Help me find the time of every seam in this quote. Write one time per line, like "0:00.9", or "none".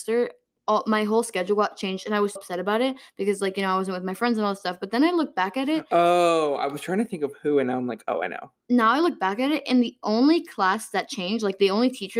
0:02.4

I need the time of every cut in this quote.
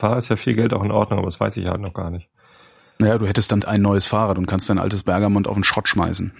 0:03.6

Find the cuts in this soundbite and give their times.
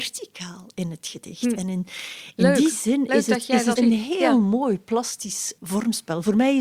0:03.8
0:05.6

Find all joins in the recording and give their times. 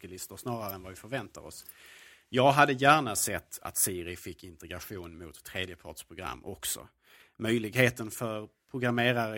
none

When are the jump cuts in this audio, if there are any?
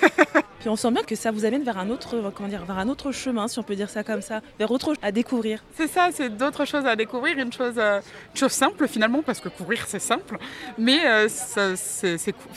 0:05.0
0:11.3

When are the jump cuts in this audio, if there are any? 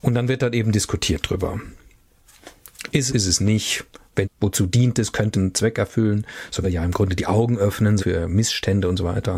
0:03.1
0:04.2
0:05.3
0:06.6
0:08.0

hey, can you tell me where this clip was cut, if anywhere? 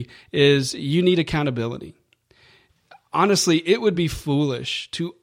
none

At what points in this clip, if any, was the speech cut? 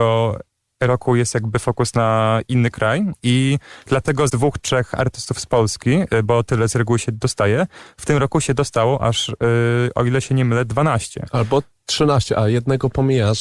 0:04.3

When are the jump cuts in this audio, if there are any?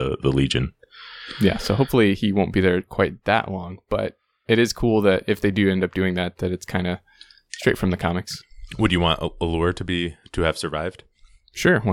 none

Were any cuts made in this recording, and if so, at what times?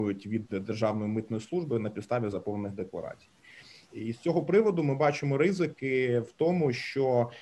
none

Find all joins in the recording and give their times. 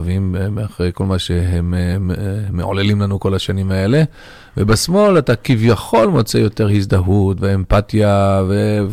none

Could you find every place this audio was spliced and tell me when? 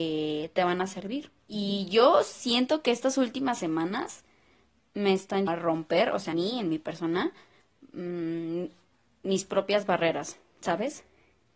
0:01.4
0:05.5
0:06.3

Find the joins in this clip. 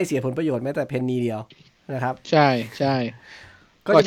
none

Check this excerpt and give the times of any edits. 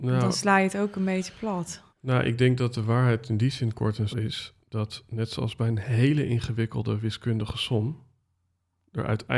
0:01.9
0:04.1
0:04.6

